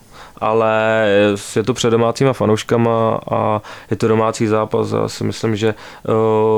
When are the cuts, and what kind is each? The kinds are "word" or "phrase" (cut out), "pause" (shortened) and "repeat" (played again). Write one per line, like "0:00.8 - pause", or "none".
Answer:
none